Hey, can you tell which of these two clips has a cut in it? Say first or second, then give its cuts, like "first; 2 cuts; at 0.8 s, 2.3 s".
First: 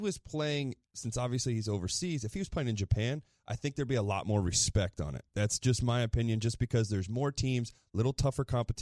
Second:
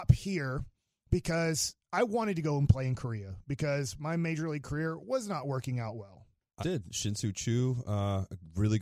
second; 1 cut; at 6.6 s